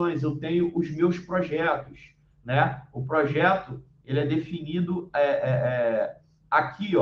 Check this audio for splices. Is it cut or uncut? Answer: uncut